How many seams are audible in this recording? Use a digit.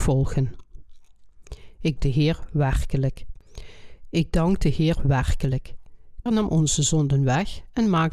2